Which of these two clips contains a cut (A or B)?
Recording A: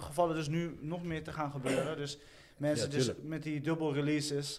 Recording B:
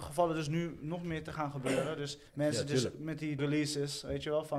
B